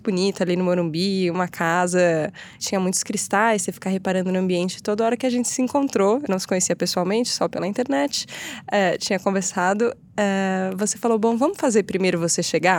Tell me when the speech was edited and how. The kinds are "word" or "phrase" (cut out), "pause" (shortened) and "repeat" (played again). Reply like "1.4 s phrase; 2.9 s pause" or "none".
2.6 s word; 6.3 s word